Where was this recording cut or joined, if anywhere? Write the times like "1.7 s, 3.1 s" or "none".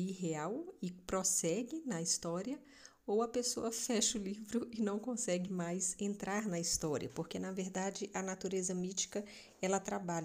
none